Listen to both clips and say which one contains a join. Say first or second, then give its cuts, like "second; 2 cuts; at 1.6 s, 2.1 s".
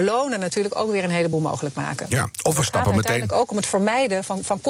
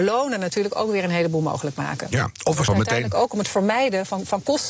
second; 1 cut; at 2.7 s